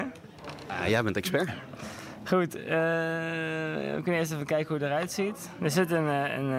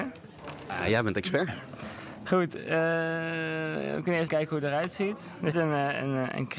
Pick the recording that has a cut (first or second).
second